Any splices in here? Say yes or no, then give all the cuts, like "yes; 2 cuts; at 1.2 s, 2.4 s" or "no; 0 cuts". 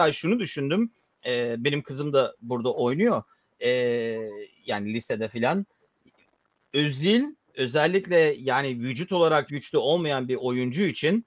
yes; 1 cut; at 9.5 s